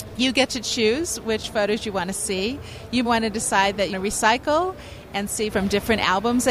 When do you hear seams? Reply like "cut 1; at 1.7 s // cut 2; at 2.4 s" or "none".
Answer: cut 1; at 3.0 s // cut 2; at 3.9 s // cut 3; at 5.5 s